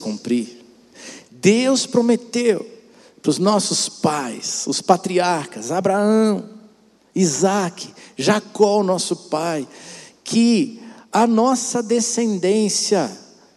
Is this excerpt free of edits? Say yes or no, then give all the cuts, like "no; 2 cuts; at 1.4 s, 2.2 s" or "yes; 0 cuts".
yes; 0 cuts